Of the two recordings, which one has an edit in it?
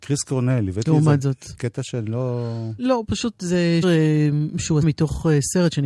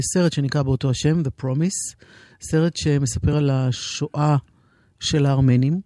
first; 3 cuts; at 2.8 s, 3.8 s, 4.8 s

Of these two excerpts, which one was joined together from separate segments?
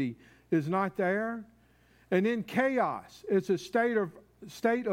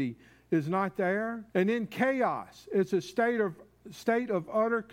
second; 1 cut; at 1.5 s

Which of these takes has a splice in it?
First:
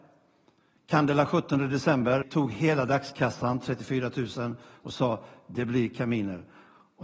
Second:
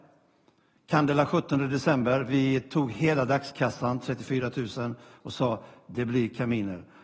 first; 1 cut; at 2.2 s

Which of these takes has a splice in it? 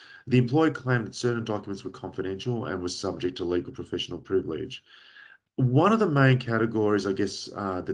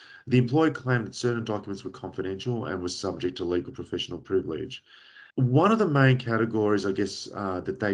second; 1 cut; at 5.3 s

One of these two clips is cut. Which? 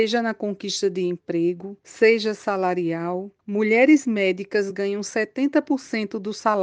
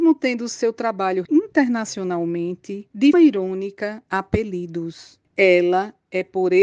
second; 3 cuts; at 1.2 s, 3.1 s, 4.1 s

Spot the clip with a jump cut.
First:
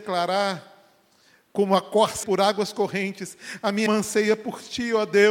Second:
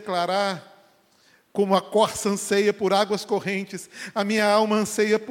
first; 2 cuts; at 2.2 s, 3.9 s

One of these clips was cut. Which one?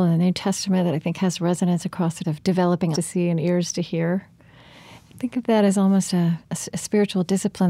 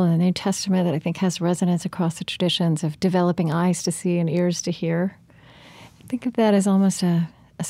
first; 3 cuts; at 2.2 s, 2.9 s, 6.4 s

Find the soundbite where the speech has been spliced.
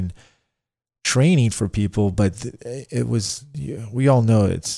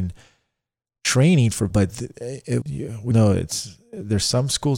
second; 3 cuts; at 1.7 s, 2.6 s, 3.1 s

